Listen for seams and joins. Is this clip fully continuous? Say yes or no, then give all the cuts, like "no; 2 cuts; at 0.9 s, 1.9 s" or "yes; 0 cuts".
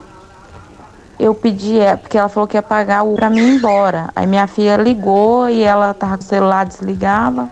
no; 2 cuts; at 3.2 s, 6.2 s